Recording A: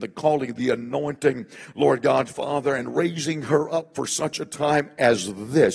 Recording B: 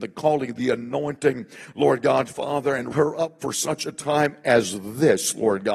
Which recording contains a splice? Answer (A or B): B